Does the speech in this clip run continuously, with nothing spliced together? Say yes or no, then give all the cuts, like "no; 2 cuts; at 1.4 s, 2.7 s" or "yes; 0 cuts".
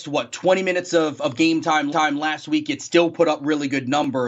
no; 1 cut; at 1.9 s